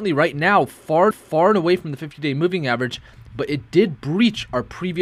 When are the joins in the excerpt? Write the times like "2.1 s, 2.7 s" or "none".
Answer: 1.1 s